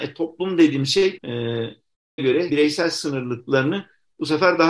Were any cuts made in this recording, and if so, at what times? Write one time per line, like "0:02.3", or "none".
0:01.2
0:02.2
0:02.5